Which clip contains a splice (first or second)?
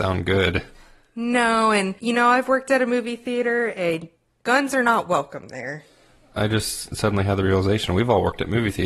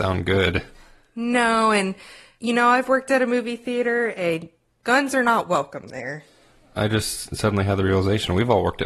first